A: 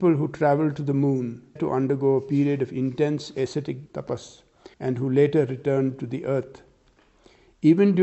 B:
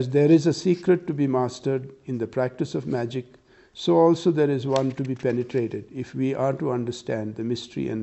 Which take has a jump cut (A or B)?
A